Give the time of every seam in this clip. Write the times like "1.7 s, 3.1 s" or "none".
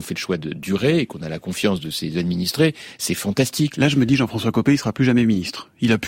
none